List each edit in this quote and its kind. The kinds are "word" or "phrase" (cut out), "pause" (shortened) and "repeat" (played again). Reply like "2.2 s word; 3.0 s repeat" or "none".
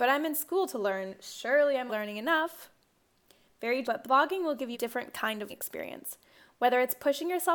1.9 s word; 3.8 s word; 4.7 s word; 5.5 s word